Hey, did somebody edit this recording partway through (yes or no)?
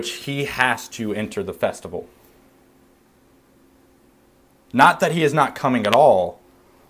no